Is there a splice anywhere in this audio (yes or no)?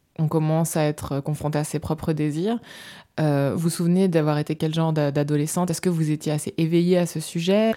yes